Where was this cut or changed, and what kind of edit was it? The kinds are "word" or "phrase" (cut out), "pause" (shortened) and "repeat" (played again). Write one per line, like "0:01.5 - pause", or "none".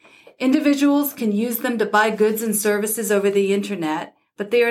none